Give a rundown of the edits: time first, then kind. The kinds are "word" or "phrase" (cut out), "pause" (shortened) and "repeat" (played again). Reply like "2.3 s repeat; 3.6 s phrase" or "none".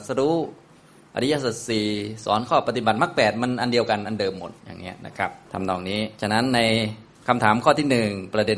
4.6 s pause; 5.4 s pause; 6.2 s pause